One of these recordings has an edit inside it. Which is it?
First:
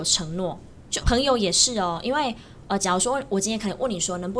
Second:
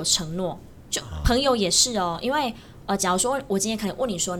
first; 1 cut; at 1.0 s

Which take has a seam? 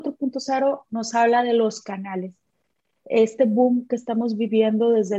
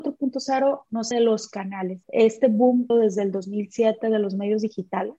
second; 3 cuts; at 1.1 s, 2.0 s, 2.9 s

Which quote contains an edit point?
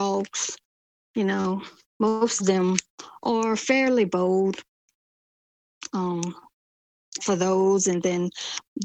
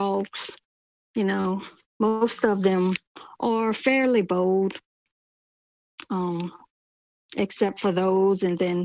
first; 2 cuts; at 2.4 s, 7.2 s

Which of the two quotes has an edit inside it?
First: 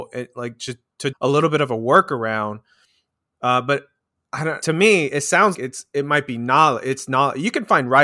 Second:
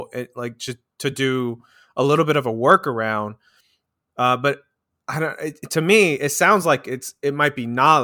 first; 3 cuts; at 1.1 s, 4.6 s, 5.5 s

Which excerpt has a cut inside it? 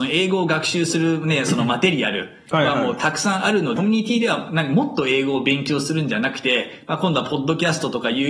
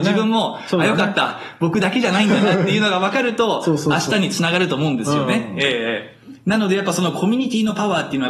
first; 1 cut; at 3.8 s

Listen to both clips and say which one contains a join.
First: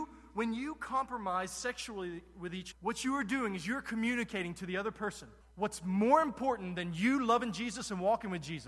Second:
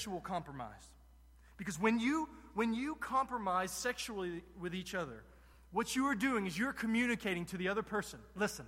first; 2 cuts; at 2.7 s, 5.4 s

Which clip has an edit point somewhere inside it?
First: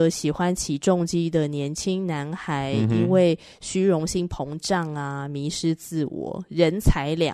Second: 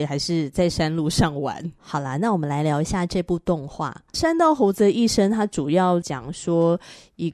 second; 1 cut; at 1.8 s

